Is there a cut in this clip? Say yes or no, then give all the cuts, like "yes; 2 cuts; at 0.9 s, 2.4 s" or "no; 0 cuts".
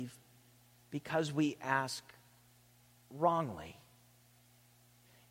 no; 0 cuts